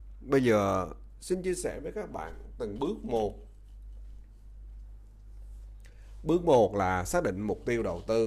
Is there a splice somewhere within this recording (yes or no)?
no